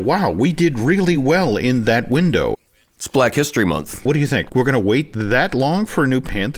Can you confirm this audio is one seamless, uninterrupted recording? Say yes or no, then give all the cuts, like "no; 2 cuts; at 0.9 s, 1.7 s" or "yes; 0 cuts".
yes; 0 cuts